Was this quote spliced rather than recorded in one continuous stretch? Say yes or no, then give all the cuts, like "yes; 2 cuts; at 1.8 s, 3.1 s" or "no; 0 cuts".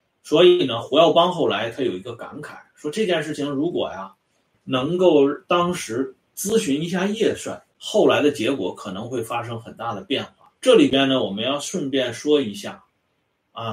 yes; 3 cuts; at 4.5 s, 7.7 s, 10.6 s